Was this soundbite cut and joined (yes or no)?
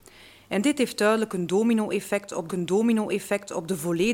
yes